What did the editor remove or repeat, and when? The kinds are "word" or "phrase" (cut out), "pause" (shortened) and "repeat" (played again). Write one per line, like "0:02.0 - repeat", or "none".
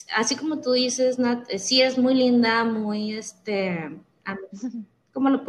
none